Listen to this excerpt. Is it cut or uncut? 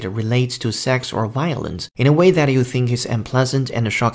cut